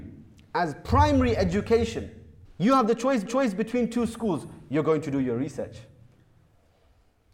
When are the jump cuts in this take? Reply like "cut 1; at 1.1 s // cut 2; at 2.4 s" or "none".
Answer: cut 1; at 2.4 s // cut 2; at 3.3 s